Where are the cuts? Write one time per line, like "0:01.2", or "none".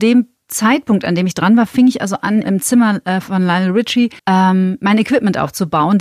0:02.4
0:04.2